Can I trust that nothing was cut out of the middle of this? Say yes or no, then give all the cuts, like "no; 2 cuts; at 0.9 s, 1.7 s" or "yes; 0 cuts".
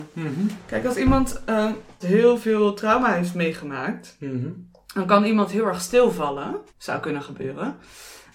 no; 2 cuts; at 2.0 s, 6.7 s